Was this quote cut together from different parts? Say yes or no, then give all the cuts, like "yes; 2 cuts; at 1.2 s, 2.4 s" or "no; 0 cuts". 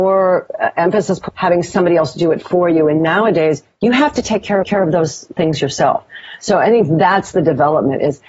yes; 2 cuts; at 1.3 s, 4.6 s